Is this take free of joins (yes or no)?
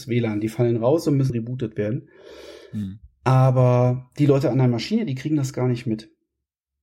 no